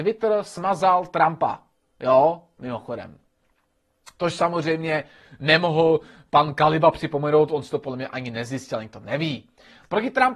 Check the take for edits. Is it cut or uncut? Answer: uncut